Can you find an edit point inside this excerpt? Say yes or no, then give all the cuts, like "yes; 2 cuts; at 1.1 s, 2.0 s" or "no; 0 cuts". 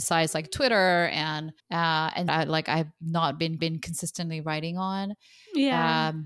yes; 3 cuts; at 1.6 s, 2.3 s, 3.6 s